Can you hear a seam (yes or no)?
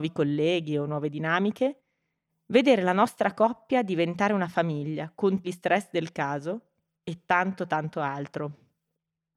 yes